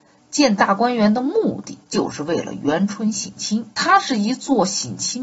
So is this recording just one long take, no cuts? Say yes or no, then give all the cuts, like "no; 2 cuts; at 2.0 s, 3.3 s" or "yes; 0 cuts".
no; 2 cuts; at 1.9 s, 3.7 s